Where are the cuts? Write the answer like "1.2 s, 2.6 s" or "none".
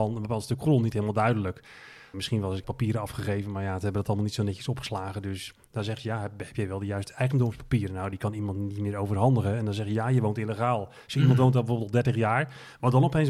2.1 s, 2.6 s

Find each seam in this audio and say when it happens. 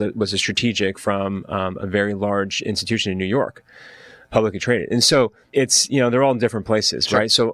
5.5 s

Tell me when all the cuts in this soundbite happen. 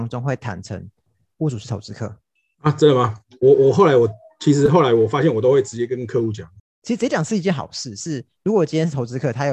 none

